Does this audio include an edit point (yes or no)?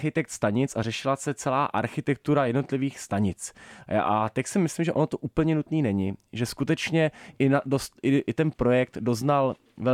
no